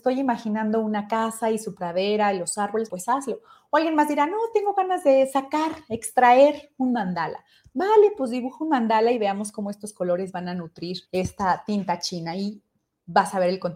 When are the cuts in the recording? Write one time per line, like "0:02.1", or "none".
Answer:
0:02.9
0:11.0